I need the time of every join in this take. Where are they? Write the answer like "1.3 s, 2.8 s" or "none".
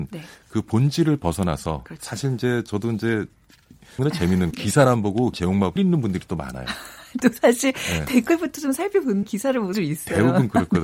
4.0 s, 4.5 s, 5.3 s, 5.8 s, 7.2 s, 9.2 s, 9.7 s